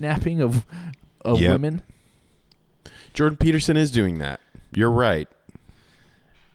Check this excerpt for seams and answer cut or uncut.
uncut